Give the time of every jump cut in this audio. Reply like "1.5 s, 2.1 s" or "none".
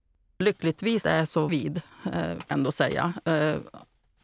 1.0 s, 1.5 s, 2.5 s